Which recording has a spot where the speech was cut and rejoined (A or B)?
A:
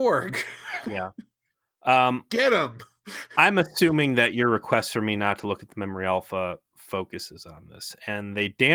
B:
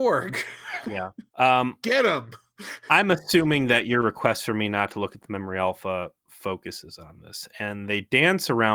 B